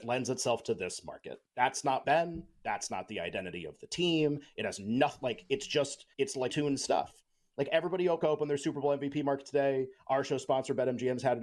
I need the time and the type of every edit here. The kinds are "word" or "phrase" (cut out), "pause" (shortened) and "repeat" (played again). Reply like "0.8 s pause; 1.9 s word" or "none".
1.5 s pause; 2.0 s phrase; 6.1 s pause; 6.5 s word; 8.2 s phrase